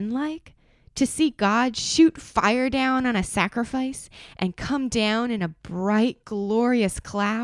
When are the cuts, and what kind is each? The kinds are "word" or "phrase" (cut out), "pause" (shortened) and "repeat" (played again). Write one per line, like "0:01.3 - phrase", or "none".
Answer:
none